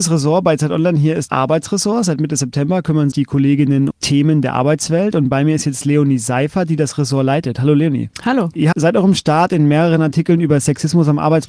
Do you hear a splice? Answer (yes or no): yes